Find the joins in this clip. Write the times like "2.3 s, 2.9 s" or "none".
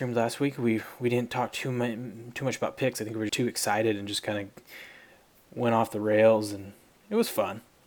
3.3 s

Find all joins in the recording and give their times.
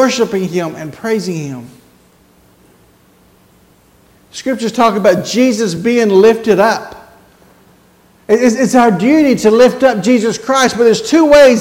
none

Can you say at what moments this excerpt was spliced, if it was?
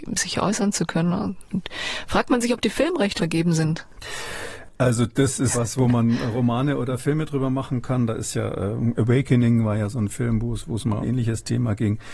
3.2 s, 5.5 s, 11.0 s

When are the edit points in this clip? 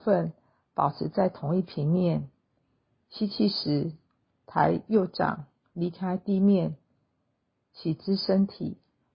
none

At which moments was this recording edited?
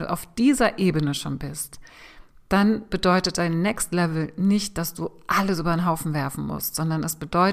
none

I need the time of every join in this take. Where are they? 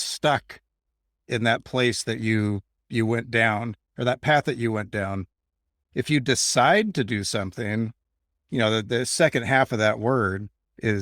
none

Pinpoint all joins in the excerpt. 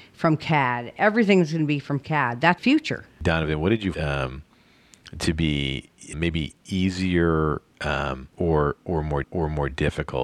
2.6 s, 3.9 s, 6.1 s, 6.6 s, 8.3 s, 9.2 s

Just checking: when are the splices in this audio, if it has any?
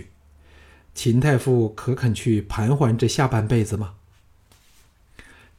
none

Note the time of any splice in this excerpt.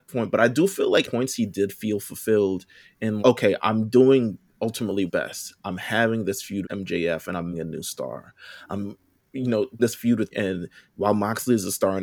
1.0 s, 3.2 s, 5.1 s, 6.6 s, 7.5 s, 9.8 s, 10.3 s

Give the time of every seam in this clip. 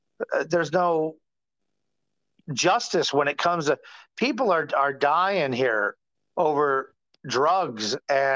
6.2 s

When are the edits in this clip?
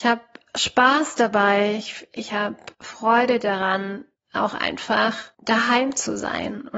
2.7 s, 5.3 s

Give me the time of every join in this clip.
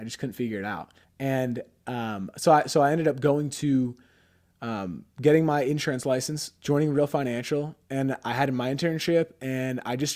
1.0 s, 5.1 s

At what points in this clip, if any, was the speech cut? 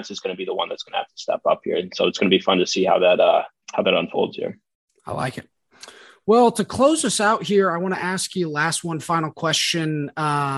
3.6 s

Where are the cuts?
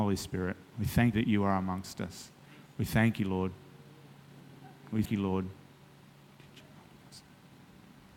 1.1 s, 5.1 s

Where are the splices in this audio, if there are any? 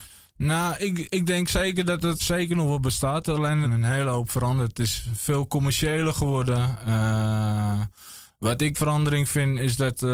2.2 s, 3.6 s, 8.7 s

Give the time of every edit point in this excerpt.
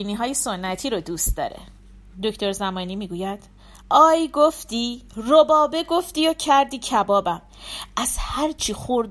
3.8 s, 5.1 s

